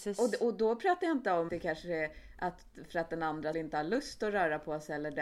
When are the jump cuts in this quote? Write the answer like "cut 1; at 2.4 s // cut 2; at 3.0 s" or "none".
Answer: cut 1; at 1.5 s // cut 2; at 3.5 s